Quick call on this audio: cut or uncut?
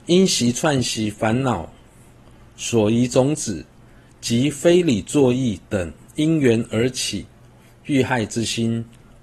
uncut